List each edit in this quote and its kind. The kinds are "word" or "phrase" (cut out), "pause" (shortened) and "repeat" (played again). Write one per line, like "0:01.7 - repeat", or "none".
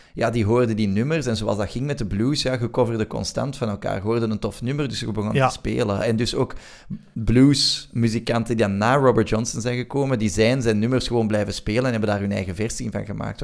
none

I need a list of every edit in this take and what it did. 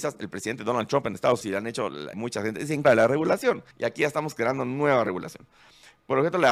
0:01.4 - word
0:02.1 - word
0:02.8 - word
0:03.7 - pause

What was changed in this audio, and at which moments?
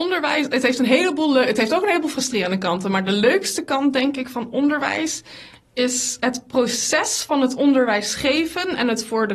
0:06.2 - word

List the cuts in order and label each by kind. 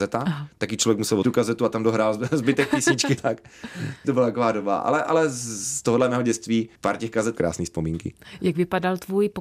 0:01.2 - word
0:03.2 - word
0:04.0 - word
0:06.8 - pause
0:07.4 - phrase

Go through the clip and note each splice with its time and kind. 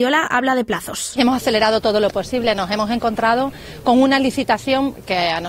none

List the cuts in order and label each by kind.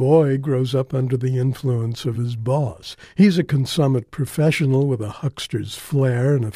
none

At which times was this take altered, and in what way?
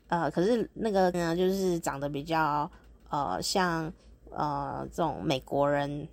0:01.1 - word

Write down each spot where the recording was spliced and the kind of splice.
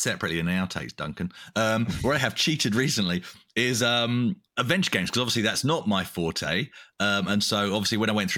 none

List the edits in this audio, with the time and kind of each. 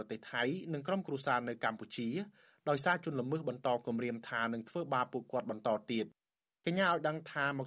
none

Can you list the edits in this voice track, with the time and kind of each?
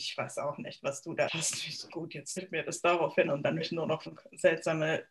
0:01.3 - word
0:01.9 - word
0:02.4 - word
0:03.3 - word
0:03.6 - word
0:04.1 - word

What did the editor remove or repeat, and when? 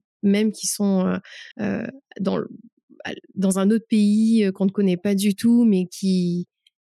0:01.5 - pause

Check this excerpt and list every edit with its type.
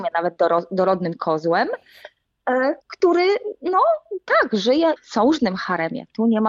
0:02.8 - pause
0:05.0 - phrase

